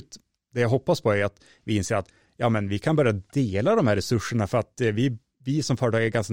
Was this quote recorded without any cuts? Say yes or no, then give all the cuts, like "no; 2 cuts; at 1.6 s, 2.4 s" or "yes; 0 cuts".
yes; 0 cuts